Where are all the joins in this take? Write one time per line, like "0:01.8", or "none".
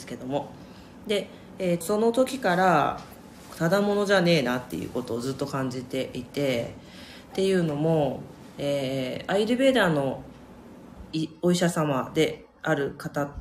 0:01.8

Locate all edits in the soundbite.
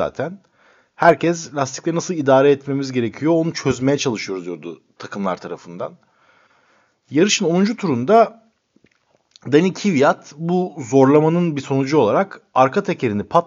none

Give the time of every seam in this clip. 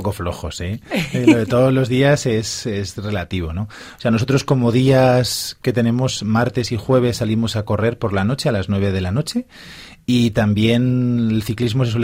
none

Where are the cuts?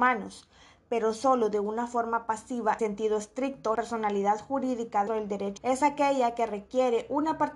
0:02.8
0:03.7
0:05.1
0:05.6

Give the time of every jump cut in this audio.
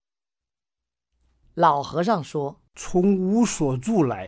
0:02.7

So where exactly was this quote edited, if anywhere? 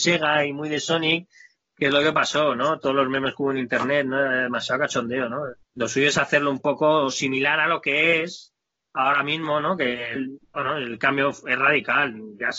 0:05.6
0:10.2

